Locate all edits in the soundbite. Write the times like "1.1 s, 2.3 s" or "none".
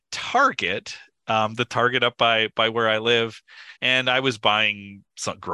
3.8 s